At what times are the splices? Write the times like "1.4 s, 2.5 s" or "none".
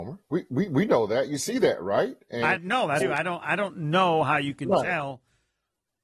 2.6 s, 3.0 s